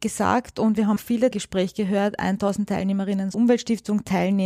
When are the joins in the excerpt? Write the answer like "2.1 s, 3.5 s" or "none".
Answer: 1.0 s, 1.3 s, 3.3 s